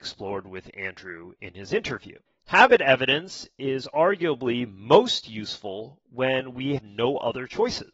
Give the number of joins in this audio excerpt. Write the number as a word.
two